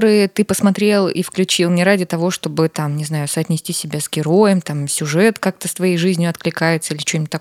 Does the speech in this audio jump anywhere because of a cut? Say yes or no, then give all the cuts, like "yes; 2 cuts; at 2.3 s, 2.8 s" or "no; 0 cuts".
no; 0 cuts